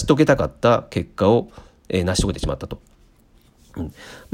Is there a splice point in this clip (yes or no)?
no